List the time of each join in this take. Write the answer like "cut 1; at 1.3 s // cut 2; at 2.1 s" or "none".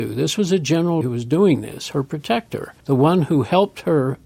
cut 1; at 1.0 s // cut 2; at 2.8 s